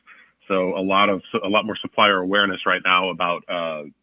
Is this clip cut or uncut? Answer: uncut